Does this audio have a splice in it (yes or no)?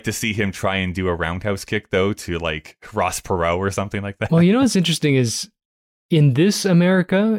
no